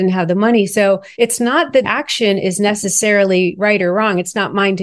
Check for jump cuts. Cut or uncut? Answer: cut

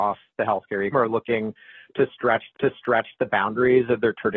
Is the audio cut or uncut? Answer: cut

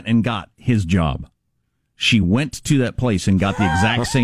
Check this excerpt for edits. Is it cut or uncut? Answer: uncut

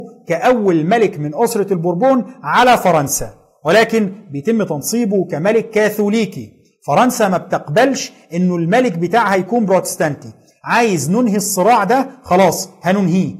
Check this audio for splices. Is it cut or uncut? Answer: uncut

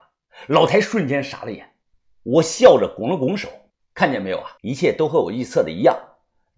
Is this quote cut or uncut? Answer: cut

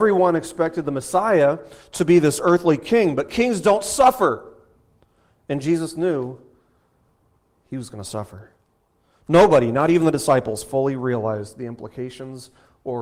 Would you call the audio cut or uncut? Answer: uncut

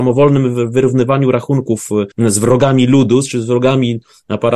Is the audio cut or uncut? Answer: cut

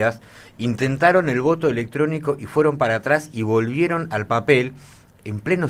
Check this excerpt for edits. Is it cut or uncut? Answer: uncut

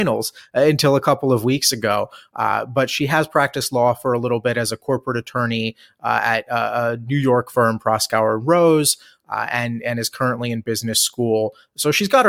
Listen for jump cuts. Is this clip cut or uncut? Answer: uncut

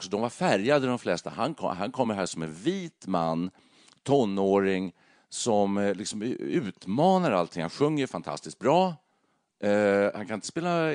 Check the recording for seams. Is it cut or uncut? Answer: uncut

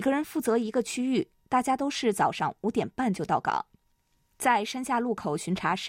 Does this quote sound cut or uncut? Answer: uncut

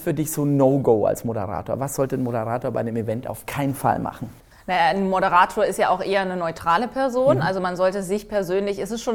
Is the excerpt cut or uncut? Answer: cut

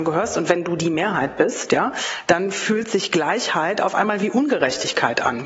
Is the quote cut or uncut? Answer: uncut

